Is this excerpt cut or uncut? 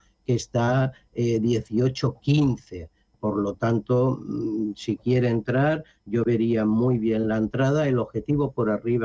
uncut